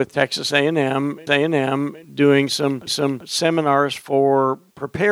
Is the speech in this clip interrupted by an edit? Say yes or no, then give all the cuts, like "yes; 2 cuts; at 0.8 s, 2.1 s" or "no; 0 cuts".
yes; 2 cuts; at 1.3 s, 2.9 s